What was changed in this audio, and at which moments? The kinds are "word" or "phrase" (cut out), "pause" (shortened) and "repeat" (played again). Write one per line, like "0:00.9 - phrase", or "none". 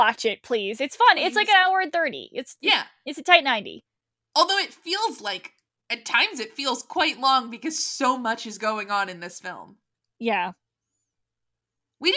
none